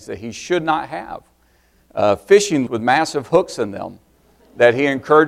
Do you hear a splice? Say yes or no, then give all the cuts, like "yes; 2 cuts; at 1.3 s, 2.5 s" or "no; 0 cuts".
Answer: yes; 1 cut; at 2.7 s